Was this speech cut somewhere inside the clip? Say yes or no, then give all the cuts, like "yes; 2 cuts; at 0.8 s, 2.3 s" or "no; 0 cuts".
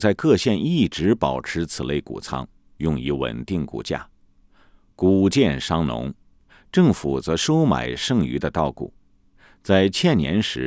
no; 0 cuts